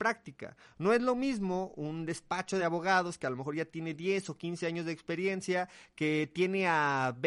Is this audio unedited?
yes; 0 cuts

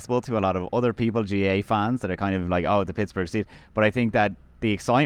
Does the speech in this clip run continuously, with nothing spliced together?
yes; 0 cuts

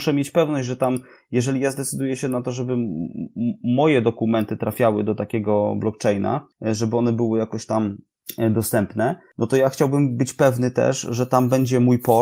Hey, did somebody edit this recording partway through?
no; 0 cuts

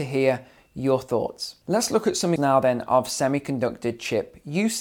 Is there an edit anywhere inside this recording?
yes; 2 cuts; at 1.6 s, 2.4 s

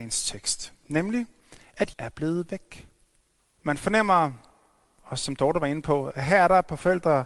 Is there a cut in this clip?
yes; 2 cuts; at 1.9 s, 3.4 s

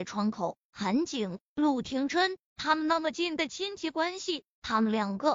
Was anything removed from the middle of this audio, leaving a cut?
no; 0 cuts

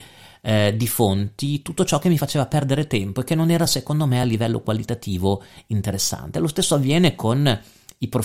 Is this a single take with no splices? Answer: yes; 0 cuts

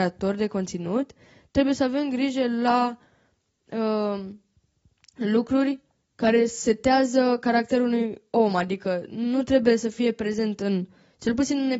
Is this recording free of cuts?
yes; 0 cuts

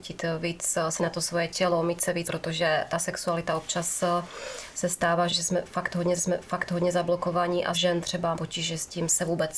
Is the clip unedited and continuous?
no; 6 cuts; at 1.0 s, 2.2 s, 5.3 s, 6.2 s, 7.7 s, 8.3 s

